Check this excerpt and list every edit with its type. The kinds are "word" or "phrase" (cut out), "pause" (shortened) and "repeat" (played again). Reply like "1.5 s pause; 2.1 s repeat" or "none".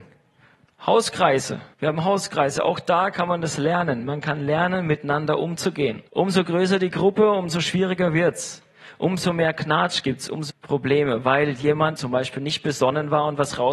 1.7 s pause; 6.1 s pause; 10.5 s word; 12.0 s word